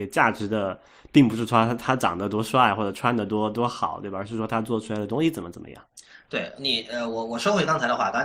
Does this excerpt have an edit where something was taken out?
no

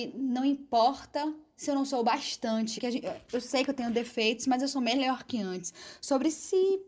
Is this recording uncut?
no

